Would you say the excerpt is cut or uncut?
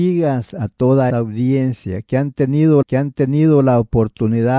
cut